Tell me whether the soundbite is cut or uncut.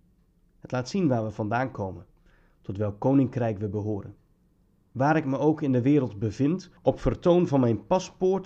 cut